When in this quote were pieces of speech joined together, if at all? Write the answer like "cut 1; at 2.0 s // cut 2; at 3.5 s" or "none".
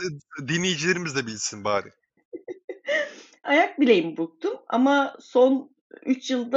cut 1; at 3.4 s

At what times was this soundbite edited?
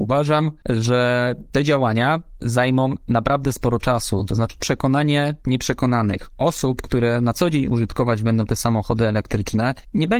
none

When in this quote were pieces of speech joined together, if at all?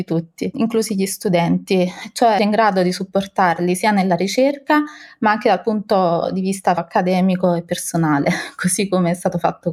cut 1; at 2.4 s // cut 2; at 6.8 s

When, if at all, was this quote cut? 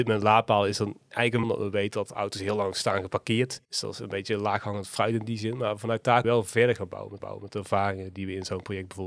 cut 1; at 1.4 s // cut 2; at 3.6 s // cut 3; at 6.2 s // cut 4; at 7.2 s

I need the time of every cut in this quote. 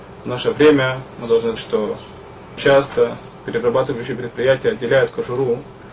cut 1; at 1.6 s // cut 2; at 2.6 s

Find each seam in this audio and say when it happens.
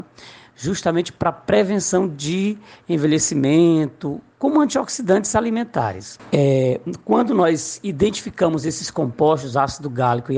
none

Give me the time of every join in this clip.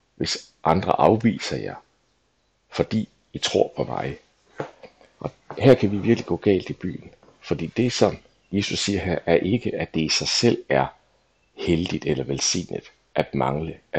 none

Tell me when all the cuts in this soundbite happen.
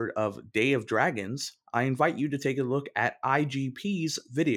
none

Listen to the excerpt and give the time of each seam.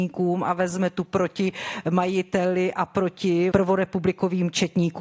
cut 1; at 1.1 s // cut 2; at 3.5 s

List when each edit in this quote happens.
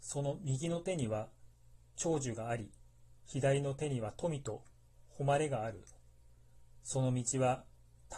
cut 1; at 3.2 s

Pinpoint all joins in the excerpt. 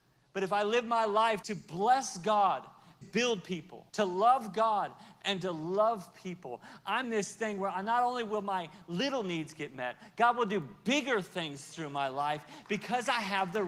cut 1; at 1.4 s // cut 2; at 3.0 s // cut 3; at 3.9 s // cut 4; at 7.0 s

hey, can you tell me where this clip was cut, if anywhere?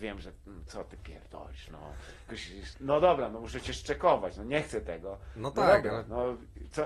cut 1; at 2.3 s // cut 2; at 2.7 s

